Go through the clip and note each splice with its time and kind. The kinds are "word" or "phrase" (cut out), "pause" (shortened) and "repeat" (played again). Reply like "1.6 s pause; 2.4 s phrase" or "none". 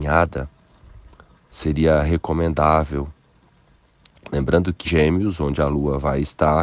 4.8 s phrase